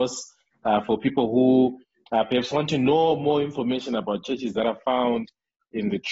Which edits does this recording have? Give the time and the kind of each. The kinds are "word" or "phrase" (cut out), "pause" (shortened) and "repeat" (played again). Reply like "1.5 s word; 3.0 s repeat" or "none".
none